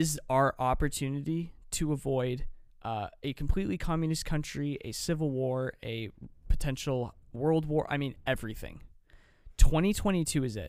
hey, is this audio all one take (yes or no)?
no